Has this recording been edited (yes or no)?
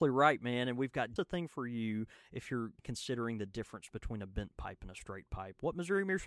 yes